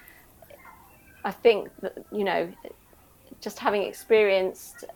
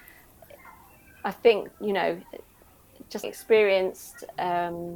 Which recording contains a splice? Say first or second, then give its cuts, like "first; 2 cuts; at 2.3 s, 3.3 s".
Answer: second; 2 cuts; at 1.7 s, 3.2 s